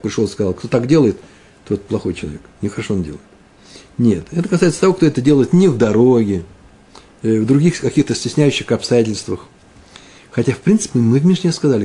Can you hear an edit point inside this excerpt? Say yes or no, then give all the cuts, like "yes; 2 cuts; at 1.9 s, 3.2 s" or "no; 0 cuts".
no; 0 cuts